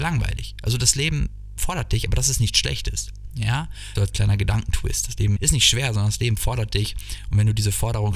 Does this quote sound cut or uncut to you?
cut